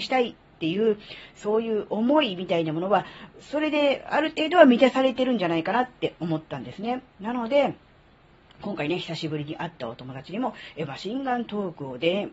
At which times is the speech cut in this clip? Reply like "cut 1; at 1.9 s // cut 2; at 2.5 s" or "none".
none